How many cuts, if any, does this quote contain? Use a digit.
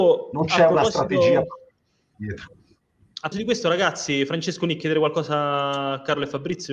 2